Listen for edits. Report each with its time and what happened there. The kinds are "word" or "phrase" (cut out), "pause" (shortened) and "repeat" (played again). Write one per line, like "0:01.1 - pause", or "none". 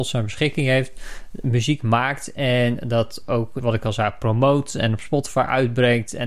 0:03.6 - word